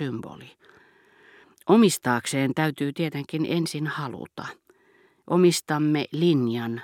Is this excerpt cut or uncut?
uncut